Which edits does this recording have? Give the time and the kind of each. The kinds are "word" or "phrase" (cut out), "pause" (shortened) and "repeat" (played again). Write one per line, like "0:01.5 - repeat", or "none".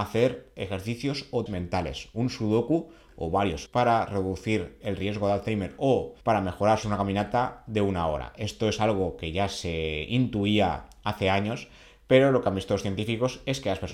0:01.5 - word
0:03.7 - phrase
0:04.8 - word
0:06.2 - pause
0:06.8 - phrase